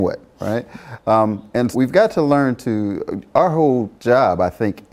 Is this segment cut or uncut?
cut